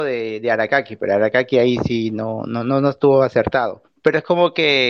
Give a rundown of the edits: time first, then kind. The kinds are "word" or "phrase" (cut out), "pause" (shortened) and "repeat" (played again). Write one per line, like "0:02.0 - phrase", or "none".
0:03.9 - pause